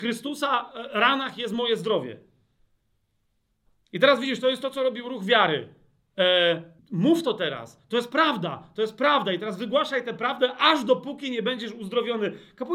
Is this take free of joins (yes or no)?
no